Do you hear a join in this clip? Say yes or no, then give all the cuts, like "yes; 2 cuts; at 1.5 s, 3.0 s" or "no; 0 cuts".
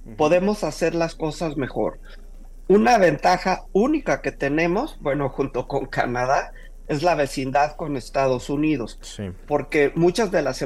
no; 0 cuts